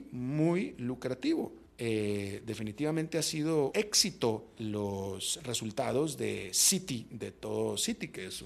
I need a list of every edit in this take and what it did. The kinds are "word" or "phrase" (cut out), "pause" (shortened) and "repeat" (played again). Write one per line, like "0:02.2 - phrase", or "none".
0:01.7 - pause
0:03.7 - word
0:04.6 - word